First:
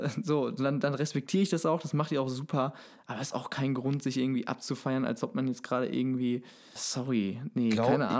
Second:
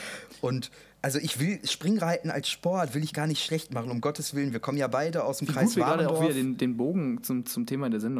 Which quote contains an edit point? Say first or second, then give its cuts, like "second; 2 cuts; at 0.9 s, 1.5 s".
first; 1 cut; at 6.8 s